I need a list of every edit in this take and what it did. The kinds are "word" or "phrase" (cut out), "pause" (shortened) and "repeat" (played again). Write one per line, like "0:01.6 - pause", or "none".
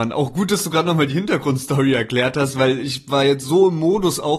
none